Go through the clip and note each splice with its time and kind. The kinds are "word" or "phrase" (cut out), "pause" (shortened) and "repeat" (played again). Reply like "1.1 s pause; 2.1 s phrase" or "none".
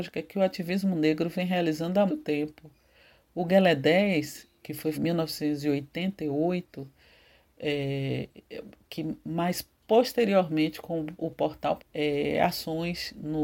2.1 s word; 4.6 s pause; 4.9 s phrase; 11.8 s phrase